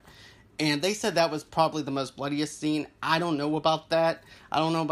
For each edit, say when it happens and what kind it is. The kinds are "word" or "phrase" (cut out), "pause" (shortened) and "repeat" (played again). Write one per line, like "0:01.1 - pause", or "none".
none